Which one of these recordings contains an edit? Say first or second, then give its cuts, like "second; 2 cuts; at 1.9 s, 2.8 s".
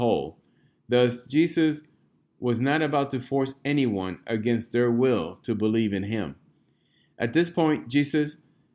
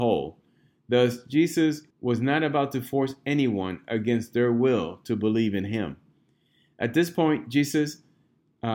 second; 1 cut; at 1.9 s